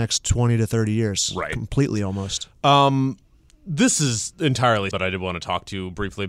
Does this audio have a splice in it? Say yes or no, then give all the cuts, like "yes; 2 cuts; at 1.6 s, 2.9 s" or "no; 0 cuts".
yes; 1 cut; at 4.9 s